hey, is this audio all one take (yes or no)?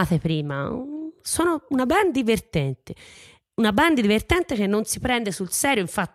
yes